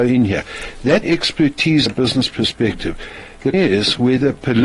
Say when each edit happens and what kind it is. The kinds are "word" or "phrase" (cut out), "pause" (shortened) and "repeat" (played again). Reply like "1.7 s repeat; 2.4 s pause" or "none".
1.0 s phrase; 1.9 s word; 3.5 s word